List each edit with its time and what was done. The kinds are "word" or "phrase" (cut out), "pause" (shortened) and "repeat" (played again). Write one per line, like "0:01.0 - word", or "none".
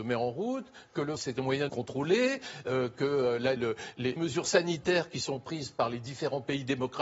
0:01.2 - word
0:01.7 - phrase
0:03.6 - word
0:04.2 - word